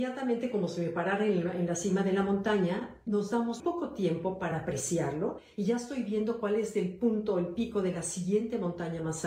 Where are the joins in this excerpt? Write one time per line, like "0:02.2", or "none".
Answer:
0:03.6